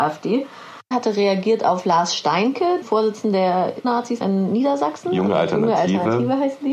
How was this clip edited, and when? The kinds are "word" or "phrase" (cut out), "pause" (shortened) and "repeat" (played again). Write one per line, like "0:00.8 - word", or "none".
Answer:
0:00.9 - word
0:02.8 - word
0:03.8 - word
0:04.2 - word